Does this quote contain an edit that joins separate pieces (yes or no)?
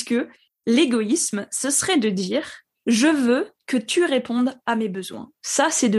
no